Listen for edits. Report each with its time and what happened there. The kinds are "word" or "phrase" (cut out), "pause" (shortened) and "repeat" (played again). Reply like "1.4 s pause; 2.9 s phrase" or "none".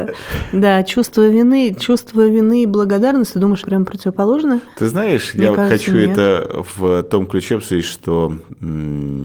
3.6 s word